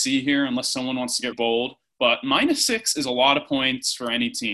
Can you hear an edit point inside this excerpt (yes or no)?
yes